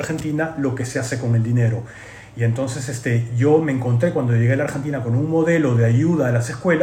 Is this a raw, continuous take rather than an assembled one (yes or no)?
yes